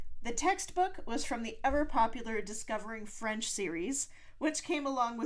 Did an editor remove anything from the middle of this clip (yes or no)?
no